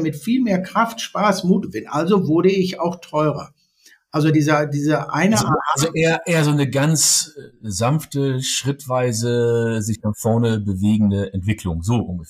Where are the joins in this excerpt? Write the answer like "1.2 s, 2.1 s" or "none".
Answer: 1.6 s, 4.3 s